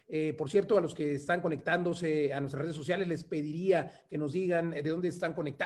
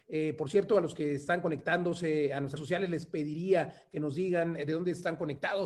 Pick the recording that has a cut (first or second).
second